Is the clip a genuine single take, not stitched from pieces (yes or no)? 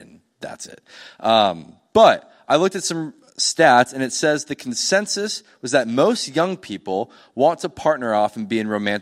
yes